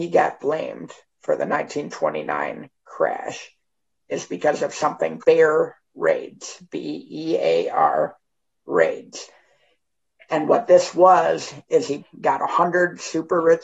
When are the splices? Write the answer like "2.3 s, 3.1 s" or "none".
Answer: 5.2 s, 12.0 s